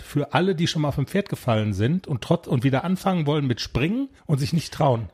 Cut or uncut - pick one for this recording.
cut